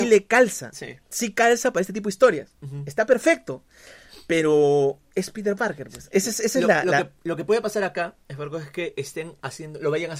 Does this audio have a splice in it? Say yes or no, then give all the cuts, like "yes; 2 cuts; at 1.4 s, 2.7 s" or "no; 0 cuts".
no; 0 cuts